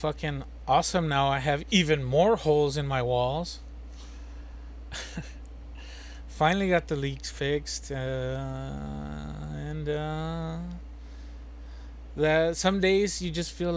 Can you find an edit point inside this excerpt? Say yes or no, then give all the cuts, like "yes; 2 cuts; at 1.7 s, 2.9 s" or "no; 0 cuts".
no; 0 cuts